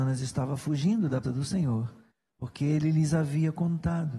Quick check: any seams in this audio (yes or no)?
yes